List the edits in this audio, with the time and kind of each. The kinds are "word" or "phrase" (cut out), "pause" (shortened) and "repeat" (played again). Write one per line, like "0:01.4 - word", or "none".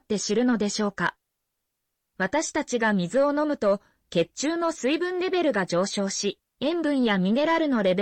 none